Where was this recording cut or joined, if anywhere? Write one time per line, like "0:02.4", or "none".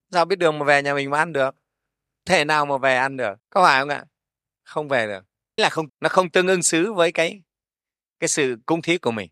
0:02.3
0:03.4
0:05.6
0:05.9

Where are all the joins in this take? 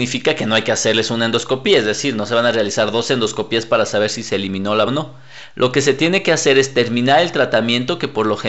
0:04.9

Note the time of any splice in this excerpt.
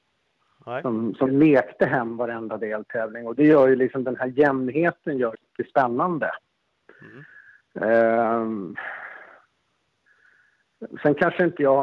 0:01.3
0:05.3

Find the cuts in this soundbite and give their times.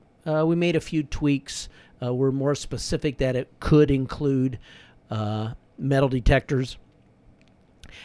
none

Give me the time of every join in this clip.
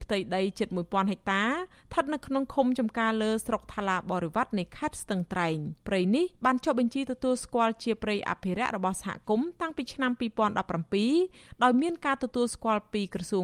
0:05.8
0:06.3

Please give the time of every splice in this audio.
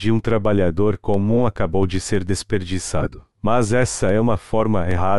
0:03.3

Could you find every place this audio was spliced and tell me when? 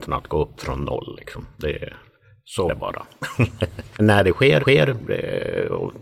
0:02.7
0:04.0
0:04.6

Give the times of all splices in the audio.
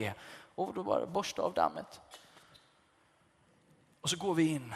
none

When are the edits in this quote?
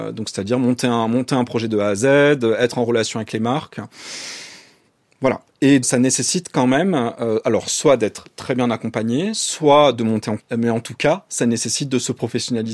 0:05.8
0:10.4

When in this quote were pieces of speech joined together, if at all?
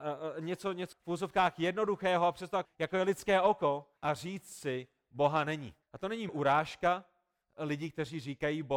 0:00.9
0:02.6
0:04.0
0:05.8
0:06.3

